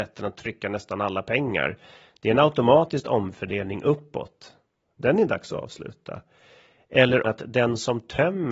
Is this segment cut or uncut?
cut